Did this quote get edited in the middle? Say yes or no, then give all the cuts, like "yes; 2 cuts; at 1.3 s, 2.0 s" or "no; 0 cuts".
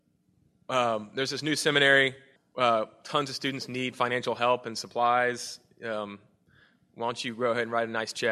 yes; 1 cut; at 2.4 s